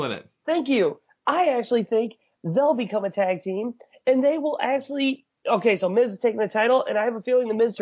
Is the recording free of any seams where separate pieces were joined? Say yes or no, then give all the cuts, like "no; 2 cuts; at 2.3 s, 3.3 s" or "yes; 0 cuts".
yes; 0 cuts